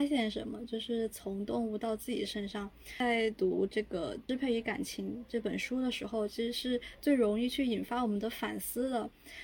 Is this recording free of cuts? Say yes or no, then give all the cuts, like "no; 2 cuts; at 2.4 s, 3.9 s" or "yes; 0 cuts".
no; 1 cut; at 4.2 s